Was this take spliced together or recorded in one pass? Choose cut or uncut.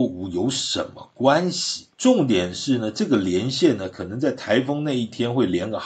cut